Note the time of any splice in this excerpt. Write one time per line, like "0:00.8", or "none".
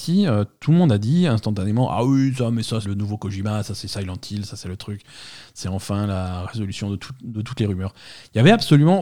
0:02.8

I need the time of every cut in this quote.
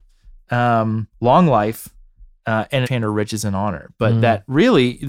0:01.1
0:02.8

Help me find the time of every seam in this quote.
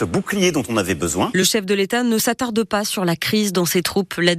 none

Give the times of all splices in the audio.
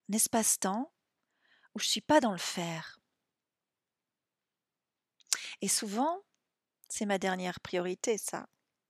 none

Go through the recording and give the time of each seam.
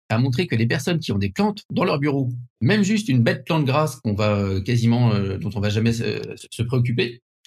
0:02.5

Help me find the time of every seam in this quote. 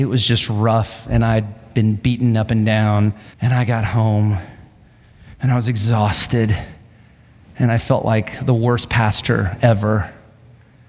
0:03.3

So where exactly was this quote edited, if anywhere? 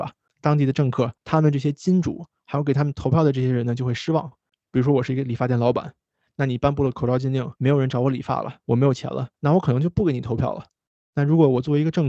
0:01.2
0:07.6
0:08.6
0:09.3

